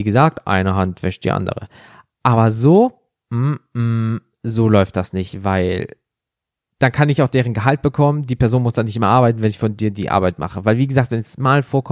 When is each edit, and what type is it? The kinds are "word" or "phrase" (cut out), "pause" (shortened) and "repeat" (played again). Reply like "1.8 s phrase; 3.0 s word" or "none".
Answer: none